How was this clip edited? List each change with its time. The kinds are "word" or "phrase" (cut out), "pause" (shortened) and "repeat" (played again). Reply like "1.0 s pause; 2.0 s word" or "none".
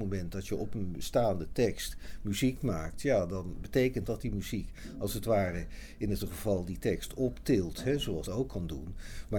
4.0 s word; 6.2 s word; 8.2 s phrase